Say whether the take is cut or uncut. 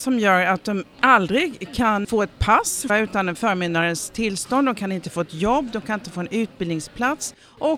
cut